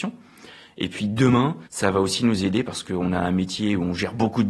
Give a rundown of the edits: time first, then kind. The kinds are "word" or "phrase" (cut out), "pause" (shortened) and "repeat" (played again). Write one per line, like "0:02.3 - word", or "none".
0:01.7 - pause

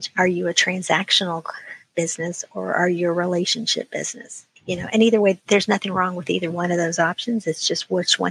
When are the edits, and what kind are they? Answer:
0:04.6 - pause

